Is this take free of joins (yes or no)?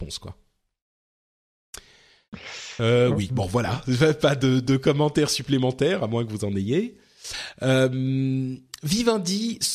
yes